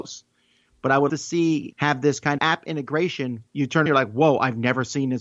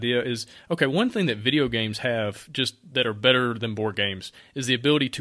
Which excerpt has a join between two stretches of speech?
first; 5 cuts; at 1.1 s, 1.7 s, 2.4 s, 3.5 s, 3.9 s

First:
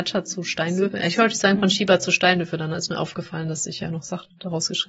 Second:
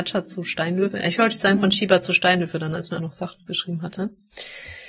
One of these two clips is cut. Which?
second; 2 cuts; at 3.0 s, 3.5 s

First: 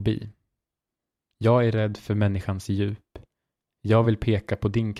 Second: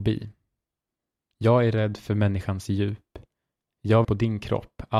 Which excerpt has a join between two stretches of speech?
second; 1 cut; at 4.0 s

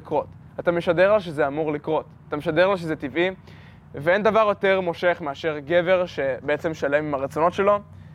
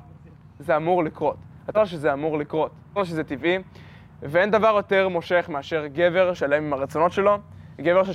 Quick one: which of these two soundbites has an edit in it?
second; 3 cuts; at 1.7 s, 3.0 s, 6.3 s

